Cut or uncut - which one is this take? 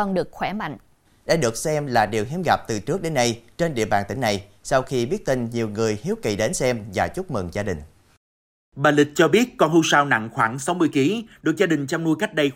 uncut